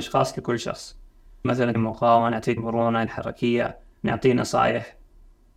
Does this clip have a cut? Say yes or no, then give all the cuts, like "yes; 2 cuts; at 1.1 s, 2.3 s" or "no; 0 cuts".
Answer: yes; 4 cuts; at 1.4 s, 1.7 s, 2.6 s, 3.1 s